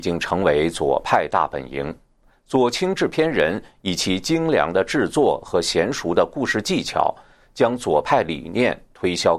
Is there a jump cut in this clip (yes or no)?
no